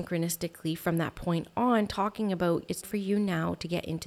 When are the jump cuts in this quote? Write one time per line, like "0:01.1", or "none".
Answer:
0:02.8